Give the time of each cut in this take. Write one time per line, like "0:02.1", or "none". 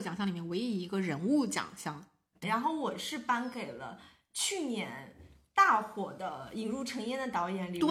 0:02.4